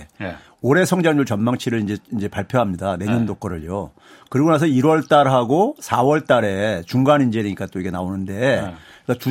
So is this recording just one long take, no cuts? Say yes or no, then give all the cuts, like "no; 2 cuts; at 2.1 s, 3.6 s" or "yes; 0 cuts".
yes; 0 cuts